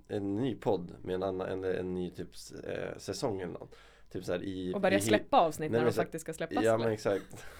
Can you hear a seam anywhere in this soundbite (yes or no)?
no